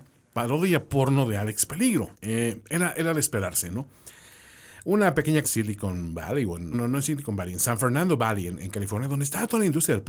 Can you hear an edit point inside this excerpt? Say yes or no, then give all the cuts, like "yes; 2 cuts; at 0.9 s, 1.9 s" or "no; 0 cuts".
yes; 3 cuts; at 2.1 s, 5.4 s, 6.7 s